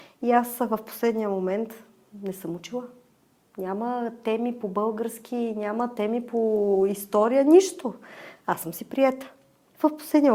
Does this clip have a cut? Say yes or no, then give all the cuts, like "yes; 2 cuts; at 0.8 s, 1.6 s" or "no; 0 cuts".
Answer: no; 0 cuts